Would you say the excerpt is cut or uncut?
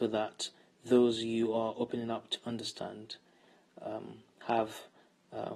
uncut